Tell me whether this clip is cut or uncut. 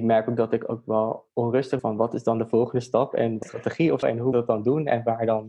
cut